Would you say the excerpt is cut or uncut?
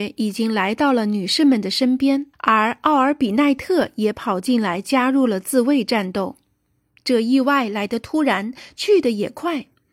cut